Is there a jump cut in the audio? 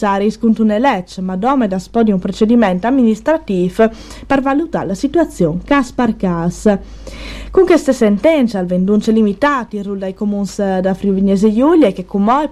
no; 0 cuts

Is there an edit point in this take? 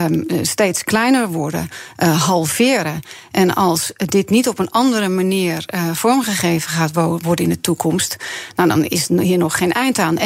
no; 0 cuts

